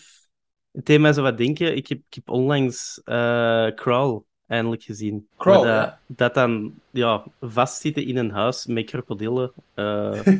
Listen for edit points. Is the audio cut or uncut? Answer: cut